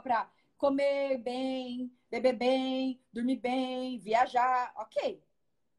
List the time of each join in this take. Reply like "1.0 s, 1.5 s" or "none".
none